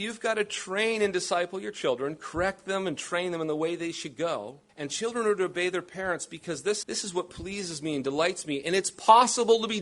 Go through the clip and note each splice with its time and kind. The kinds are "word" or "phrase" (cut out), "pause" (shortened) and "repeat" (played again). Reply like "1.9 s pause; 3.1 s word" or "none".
4.7 s pause; 6.8 s word